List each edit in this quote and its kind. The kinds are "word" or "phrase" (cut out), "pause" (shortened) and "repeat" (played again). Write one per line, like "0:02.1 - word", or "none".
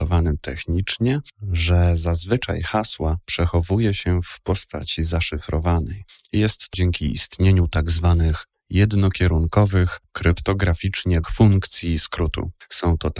0:06.7 - word
0:11.2 - word

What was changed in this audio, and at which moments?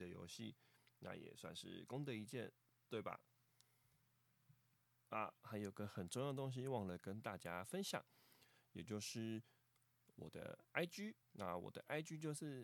0:11.2 - pause

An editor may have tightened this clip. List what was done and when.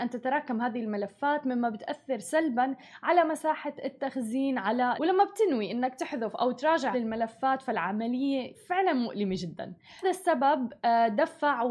0:05.0 - word
0:06.9 - word
0:08.5 - word
0:10.0 - word

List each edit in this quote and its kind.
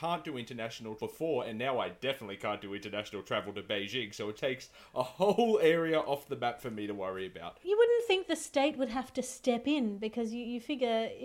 0:01.0 - word
0:04.3 - word

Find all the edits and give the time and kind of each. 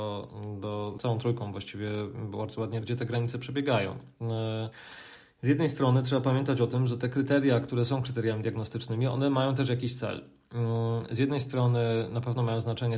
0:01.0 - word
0:02.8 - word

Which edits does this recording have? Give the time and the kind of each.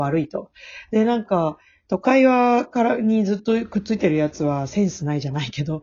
none

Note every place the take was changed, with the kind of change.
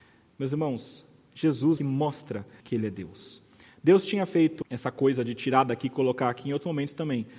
0:01.8 - word
0:02.6 - word
0:04.6 - word

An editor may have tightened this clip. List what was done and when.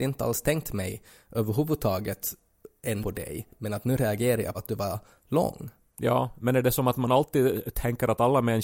0:03.0 - word
0:04.5 - word

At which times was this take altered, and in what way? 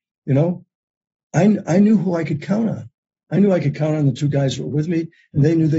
none

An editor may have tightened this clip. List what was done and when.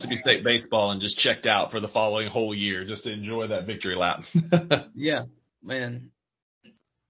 none

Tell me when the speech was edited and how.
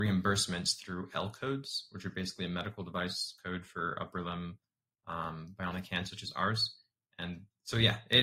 none

